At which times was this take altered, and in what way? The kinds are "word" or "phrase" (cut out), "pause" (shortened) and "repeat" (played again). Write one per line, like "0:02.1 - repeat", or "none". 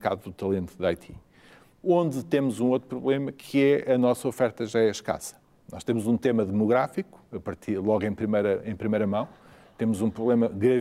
none